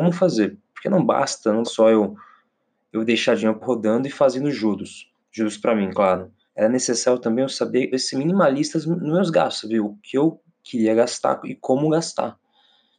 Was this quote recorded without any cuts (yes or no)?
no